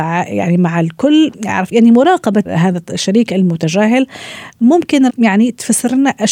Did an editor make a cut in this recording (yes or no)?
yes